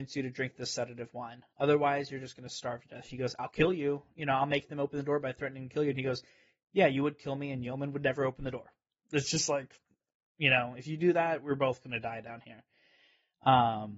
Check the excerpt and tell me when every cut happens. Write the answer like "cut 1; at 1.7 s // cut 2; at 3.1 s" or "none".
none

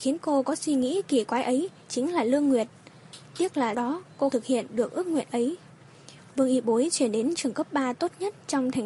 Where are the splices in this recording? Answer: cut 1; at 3.7 s // cut 2; at 4.3 s

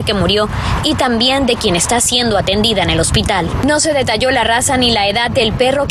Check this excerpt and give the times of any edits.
none

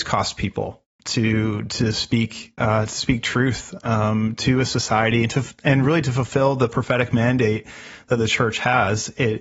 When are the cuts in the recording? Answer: none

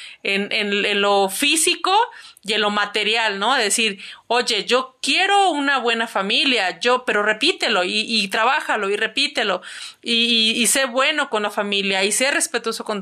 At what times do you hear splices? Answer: none

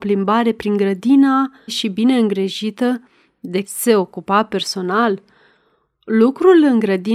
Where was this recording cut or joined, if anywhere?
cut 1; at 1.7 s // cut 2; at 3.6 s

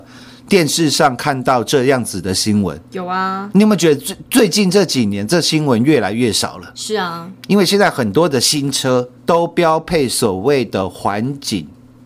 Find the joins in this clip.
cut 1; at 9.2 s

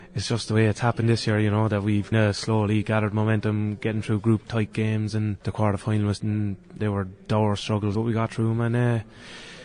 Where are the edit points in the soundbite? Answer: cut 1; at 2.1 s // cut 2; at 4.4 s // cut 3; at 5.4 s // cut 4; at 6.2 s // cut 5; at 6.8 s // cut 6; at 7.9 s

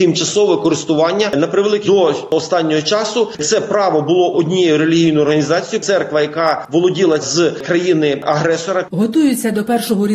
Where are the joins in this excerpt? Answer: cut 1; at 1.8 s // cut 2; at 4.3 s // cut 3; at 7.2 s

